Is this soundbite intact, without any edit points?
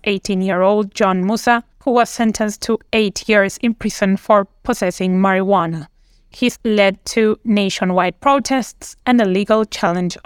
no; 2 cuts; at 1.7 s, 6.5 s

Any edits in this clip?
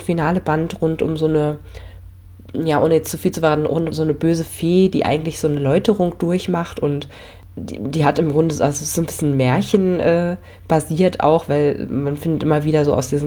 yes; 1 cut; at 3.9 s

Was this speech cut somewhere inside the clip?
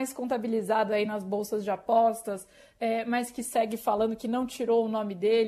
no; 0 cuts

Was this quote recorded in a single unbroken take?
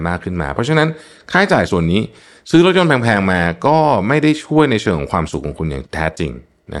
yes; 0 cuts

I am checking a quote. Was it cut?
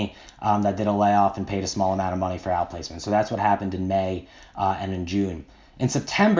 no; 0 cuts

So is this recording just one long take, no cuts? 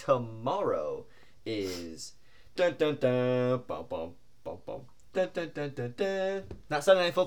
no; 1 cut; at 2.6 s

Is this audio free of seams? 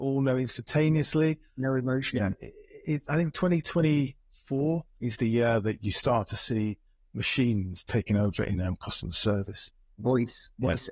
yes; 0 cuts

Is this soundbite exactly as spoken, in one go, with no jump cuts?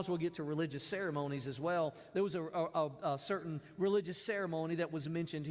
yes; 0 cuts

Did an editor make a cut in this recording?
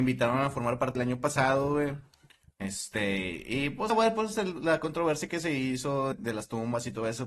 yes; 3 cuts; at 0.9 s, 3.9 s, 6.1 s

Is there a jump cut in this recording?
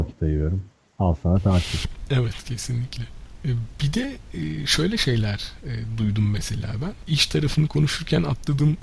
no; 0 cuts

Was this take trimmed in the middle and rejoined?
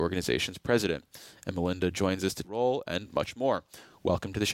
yes; 1 cut; at 2.4 s

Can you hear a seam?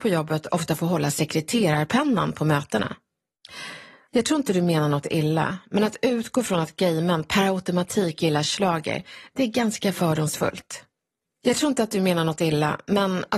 no; 0 cuts

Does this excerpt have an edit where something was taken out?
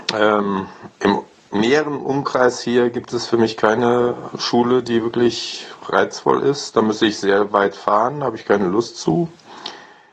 no; 0 cuts

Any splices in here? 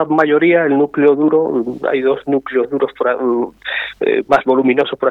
no; 0 cuts

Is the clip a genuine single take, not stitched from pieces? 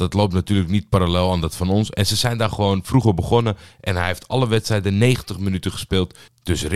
yes; 0 cuts

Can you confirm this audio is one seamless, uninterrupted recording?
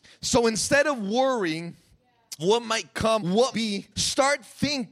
no; 4 cuts; at 2.4 s, 3.2 s, 3.5 s, 3.9 s

